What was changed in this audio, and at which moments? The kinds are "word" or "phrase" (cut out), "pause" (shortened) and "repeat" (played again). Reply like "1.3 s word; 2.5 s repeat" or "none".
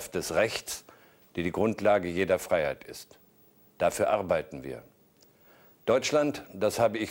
none